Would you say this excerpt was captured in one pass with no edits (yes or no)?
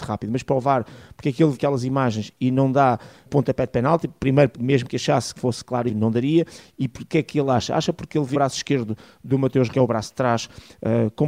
no